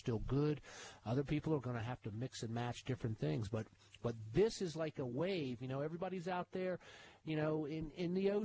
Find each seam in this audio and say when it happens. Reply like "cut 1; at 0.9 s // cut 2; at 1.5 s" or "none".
none